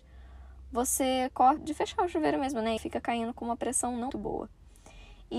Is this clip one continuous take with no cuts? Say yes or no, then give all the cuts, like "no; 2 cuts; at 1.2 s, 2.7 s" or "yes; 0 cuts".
no; 3 cuts; at 1.6 s, 2.8 s, 4.1 s